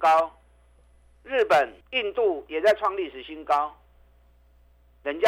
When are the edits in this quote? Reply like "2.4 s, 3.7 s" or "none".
1.8 s